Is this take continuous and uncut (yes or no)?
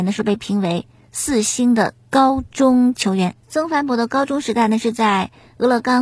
no